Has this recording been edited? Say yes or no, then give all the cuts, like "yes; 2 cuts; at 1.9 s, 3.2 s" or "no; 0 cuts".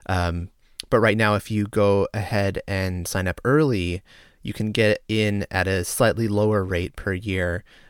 no; 0 cuts